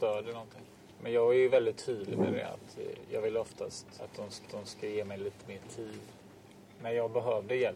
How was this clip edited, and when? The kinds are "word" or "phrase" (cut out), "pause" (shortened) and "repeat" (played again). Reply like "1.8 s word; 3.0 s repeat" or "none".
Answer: 4.5 s repeat